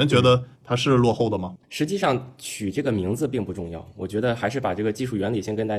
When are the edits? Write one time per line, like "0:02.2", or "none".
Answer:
0:01.6